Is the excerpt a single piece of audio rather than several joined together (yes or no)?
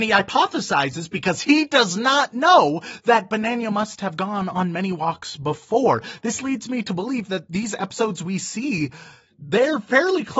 yes